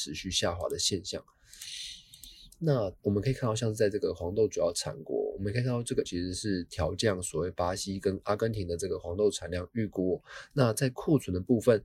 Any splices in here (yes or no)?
yes